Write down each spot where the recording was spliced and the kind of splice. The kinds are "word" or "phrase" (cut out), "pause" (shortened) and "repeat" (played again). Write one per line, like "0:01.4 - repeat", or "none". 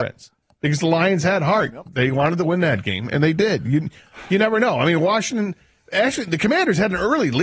none